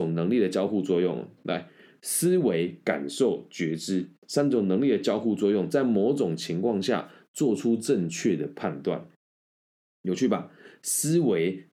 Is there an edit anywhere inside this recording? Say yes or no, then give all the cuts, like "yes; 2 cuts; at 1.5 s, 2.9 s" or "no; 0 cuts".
no; 0 cuts